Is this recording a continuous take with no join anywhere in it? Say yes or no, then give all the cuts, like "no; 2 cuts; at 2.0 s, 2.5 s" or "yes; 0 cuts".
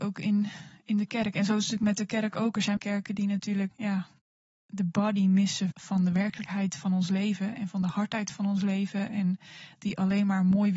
no; 3 cuts; at 2.8 s, 3.7 s, 5.7 s